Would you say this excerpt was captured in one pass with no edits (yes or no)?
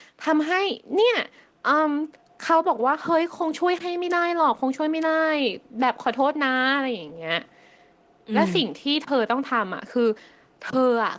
yes